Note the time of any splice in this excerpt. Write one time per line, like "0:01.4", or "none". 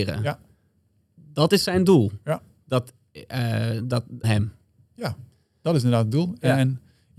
0:04.2